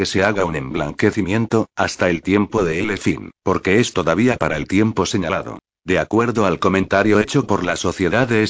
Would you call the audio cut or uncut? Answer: cut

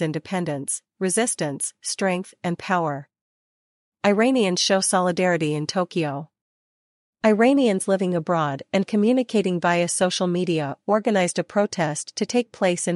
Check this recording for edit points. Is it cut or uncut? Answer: uncut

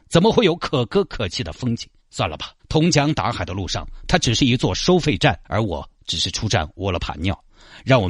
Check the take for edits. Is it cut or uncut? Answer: cut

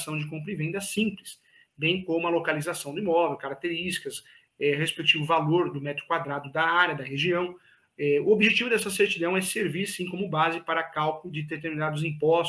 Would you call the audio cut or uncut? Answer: uncut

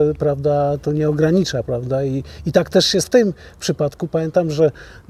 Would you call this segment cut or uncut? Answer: cut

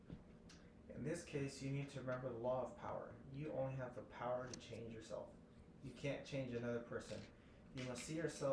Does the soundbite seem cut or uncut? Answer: uncut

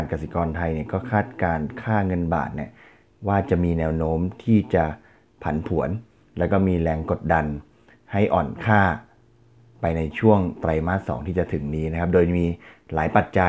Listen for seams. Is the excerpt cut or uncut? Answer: uncut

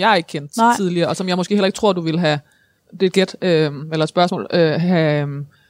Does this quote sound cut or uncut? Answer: uncut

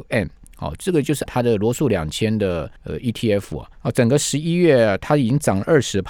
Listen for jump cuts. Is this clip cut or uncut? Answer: cut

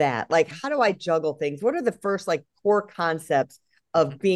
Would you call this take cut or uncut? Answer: uncut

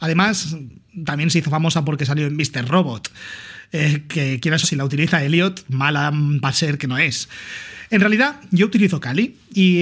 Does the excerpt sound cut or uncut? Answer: cut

